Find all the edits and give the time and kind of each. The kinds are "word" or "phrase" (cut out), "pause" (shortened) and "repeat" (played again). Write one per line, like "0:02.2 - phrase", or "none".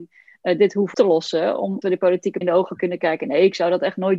0:00.9 - word
0:01.8 - word
0:02.4 - word